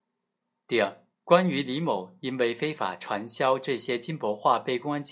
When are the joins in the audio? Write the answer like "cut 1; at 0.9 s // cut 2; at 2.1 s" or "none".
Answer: cut 1; at 1.1 s